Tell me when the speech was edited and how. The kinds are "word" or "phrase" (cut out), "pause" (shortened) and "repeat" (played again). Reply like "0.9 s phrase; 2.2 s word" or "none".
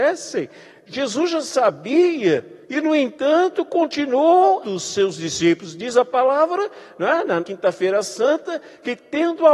2.6 s pause; 4.6 s word; 7.4 s word